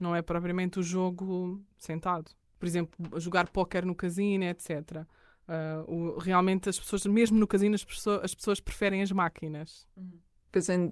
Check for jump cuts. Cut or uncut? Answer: uncut